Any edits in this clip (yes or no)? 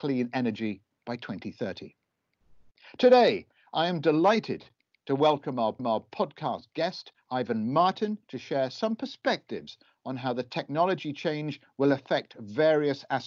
yes